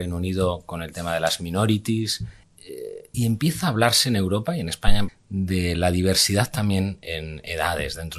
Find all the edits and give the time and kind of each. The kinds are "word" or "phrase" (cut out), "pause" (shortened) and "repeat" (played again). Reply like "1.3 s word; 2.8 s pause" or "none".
2.4 s word; 3.1 s word; 5.1 s word

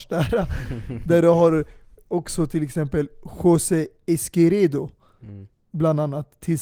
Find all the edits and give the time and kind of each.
none

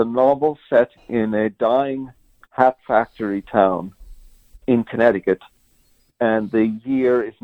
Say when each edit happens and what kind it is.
none

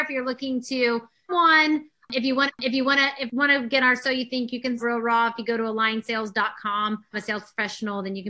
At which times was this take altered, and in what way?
1.3 s word; 2.5 s repeat; 3.8 s word; 4.8 s word; 7.1 s word

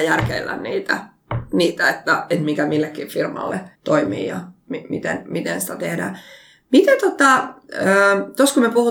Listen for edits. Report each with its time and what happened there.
3.8 s pause

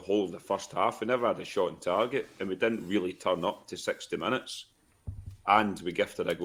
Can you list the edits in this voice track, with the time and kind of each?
none

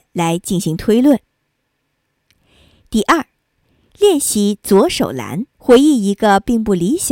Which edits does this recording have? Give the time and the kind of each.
5.5 s pause

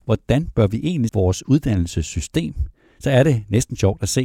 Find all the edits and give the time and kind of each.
1.1 s word

